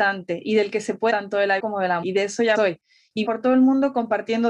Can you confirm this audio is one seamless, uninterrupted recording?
no; 5 cuts; at 1.1 s, 1.6 s, 2.0 s, 2.6 s, 3.3 s

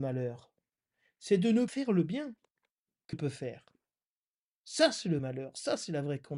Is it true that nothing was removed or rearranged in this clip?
no; 3 cuts; at 1.7 s, 3.1 s, 5.2 s

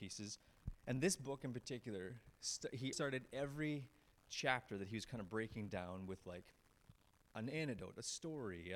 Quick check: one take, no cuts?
no; 1 cut; at 2.9 s

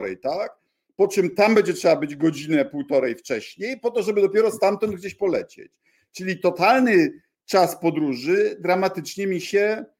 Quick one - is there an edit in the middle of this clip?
no; 0 cuts

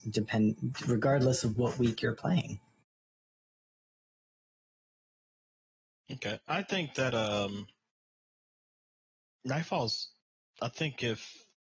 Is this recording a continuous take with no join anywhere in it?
yes; 0 cuts

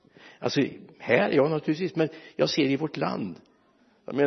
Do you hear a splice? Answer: no; 0 cuts

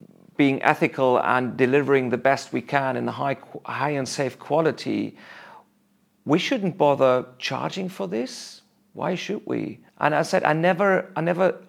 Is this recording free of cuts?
no; 1 cut; at 9.9 s

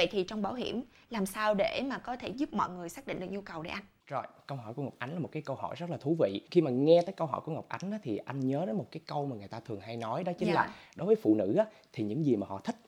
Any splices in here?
no; 0 cuts

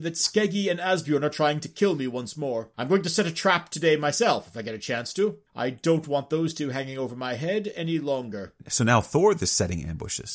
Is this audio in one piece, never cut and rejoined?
no; 2 cuts; at 2.7 s, 5.5 s

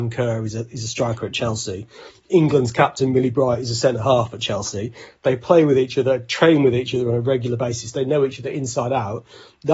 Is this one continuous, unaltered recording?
yes; 0 cuts

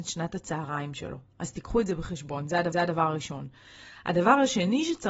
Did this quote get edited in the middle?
yes; 1 cut; at 2.7 s

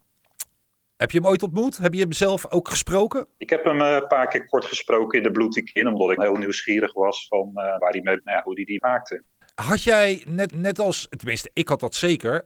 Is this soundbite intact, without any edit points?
no; 7 cuts; at 3.3 s, 6.2 s, 7.8 s, 8.2 s, 8.8 s, 9.4 s, 10.5 s

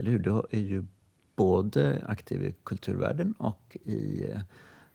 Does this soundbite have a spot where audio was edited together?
no; 0 cuts

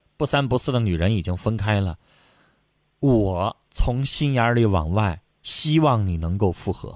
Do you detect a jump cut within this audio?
yes; 2 cuts; at 3.6 s, 5.3 s

